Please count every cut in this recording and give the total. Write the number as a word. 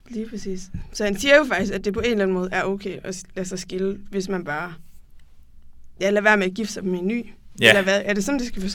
one